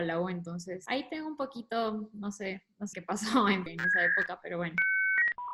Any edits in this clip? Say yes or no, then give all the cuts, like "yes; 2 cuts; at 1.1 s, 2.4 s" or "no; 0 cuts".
yes; 2 cuts; at 2.9 s, 3.7 s